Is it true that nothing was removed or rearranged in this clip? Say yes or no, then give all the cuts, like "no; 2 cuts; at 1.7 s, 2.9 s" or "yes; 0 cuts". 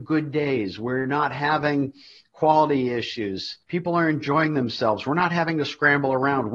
no; 1 cut; at 3.6 s